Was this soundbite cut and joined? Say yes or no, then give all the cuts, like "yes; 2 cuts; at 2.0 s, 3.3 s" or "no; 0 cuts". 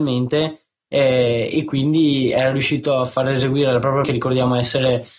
yes; 1 cut; at 4.0 s